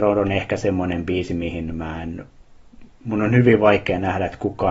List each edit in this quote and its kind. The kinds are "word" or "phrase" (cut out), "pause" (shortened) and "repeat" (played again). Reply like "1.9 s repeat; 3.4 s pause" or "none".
none

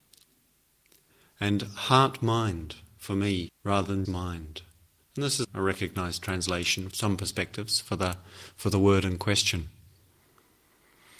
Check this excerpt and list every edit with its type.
3.5 s phrase; 4.0 s word; 5.4 s word; 6.9 s word

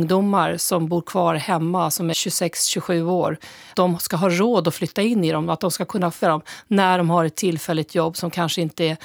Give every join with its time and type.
2.1 s word; 3.7 s word; 6.2 s word

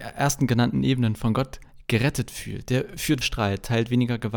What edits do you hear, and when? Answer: 3.2 s word

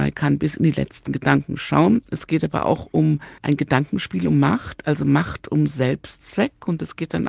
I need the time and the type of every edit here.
3.4 s pause

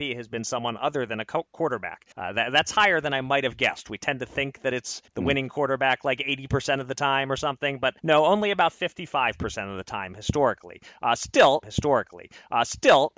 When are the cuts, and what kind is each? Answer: 2.1 s pause; 5.1 s pause; 8.0 s pause; 11.6 s repeat

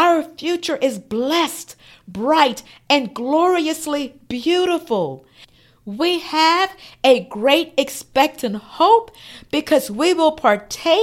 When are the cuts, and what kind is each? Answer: none

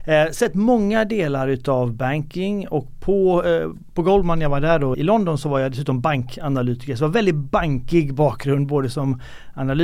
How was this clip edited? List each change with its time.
4.9 s word

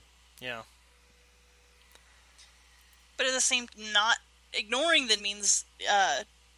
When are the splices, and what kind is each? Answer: 3.7 s word; 5.2 s word

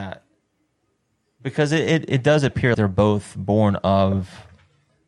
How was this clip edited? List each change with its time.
2.7 s word

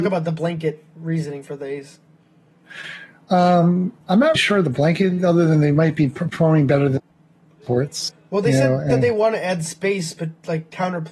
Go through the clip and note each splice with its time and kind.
4.0 s pause; 4.4 s word; 8.9 s word

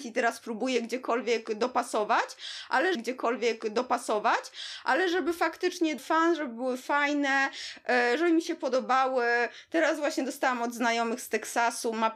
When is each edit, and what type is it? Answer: 2.9 s repeat; 6.0 s word

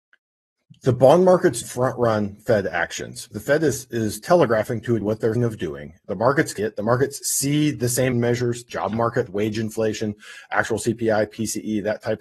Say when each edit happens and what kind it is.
1.6 s word; 3.3 s word; 5.0 s word; 5.4 s word; 6.6 s word; 8.1 s word; 8.7 s word; 9.3 s word

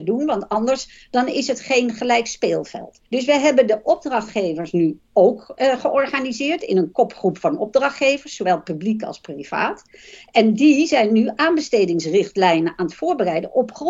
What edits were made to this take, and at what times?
3.1 s pause

